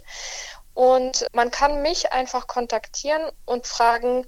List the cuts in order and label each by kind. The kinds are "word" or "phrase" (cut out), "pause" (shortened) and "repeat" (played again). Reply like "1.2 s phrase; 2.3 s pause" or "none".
1.3 s word

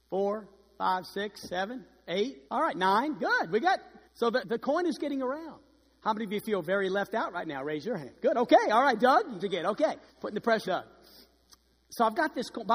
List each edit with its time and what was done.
2.5 s pause; 4.0 s pause; 4.4 s word; 9.4 s phrase; 10.1 s pause; 10.6 s word

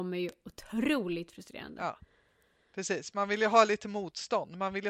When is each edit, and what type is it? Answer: none

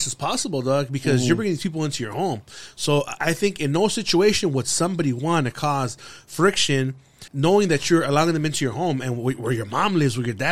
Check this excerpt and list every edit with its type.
3.2 s word; 7.3 s pause; 9.4 s word

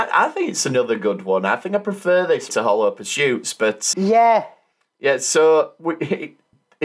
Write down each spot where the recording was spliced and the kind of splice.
2.5 s word; 3.9 s word

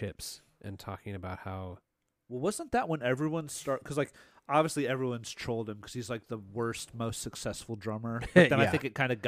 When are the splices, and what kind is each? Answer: none

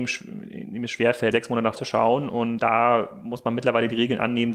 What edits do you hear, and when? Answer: 1.3 s word; 1.8 s word; 2.6 s word

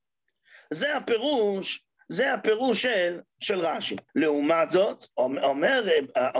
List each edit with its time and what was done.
4.1 s pause; 5.1 s pause

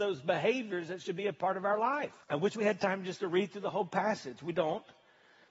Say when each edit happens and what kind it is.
2.2 s pause

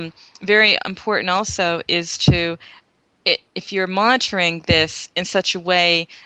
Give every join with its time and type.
none

